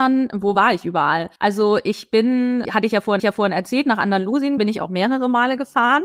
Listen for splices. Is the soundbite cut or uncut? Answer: cut